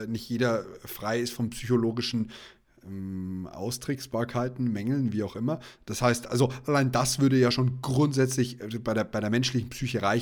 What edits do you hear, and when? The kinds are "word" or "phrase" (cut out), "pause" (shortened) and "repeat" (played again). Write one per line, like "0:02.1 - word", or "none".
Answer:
none